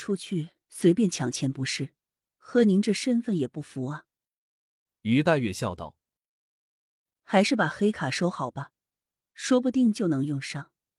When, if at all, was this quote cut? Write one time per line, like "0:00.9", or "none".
none